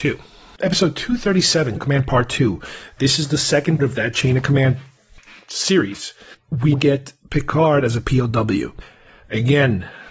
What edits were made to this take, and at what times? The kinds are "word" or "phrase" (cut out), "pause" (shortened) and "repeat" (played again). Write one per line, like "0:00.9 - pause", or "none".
0:01.8 - word
0:03.8 - word
0:06.3 - word
0:06.7 - word